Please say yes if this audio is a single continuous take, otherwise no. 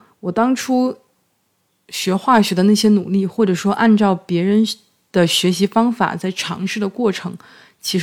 yes